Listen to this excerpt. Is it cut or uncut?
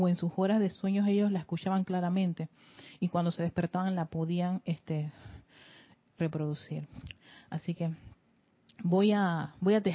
uncut